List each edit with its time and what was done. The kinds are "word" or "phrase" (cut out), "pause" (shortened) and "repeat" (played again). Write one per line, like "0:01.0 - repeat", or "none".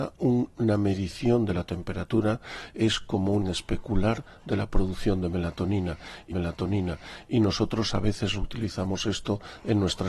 0:03.4 - word
0:06.3 - repeat

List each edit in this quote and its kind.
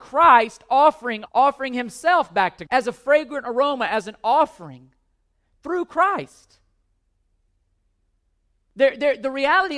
0:01.3 - word
0:02.7 - word

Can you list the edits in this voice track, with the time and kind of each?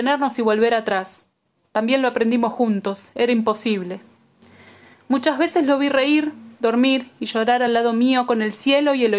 none

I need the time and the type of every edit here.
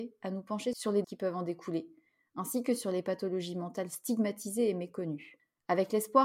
0:01.0 - word

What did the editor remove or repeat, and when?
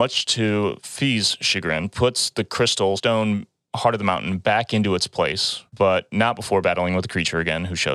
0:03.0 - word
0:05.7 - pause

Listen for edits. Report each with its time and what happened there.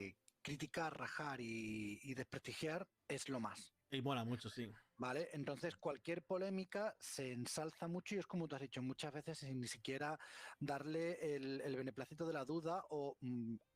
0:03.0 - pause
0:04.9 - pause

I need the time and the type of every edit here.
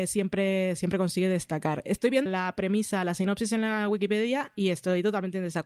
0:02.3 - word

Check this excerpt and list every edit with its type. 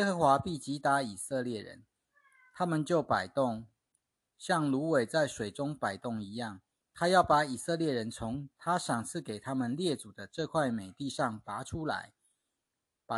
0:06.8 - pause

